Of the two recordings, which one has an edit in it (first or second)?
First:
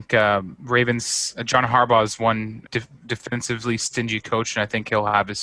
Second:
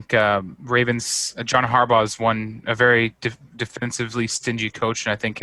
first